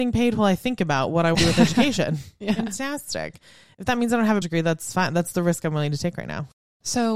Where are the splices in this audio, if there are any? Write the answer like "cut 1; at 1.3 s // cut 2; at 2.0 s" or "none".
cut 1; at 1.3 s // cut 2; at 4.4 s